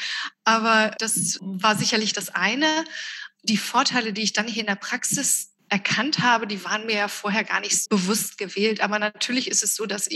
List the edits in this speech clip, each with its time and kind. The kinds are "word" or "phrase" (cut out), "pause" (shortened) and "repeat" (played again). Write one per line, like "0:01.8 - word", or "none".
0:00.9 - word
0:07.8 - word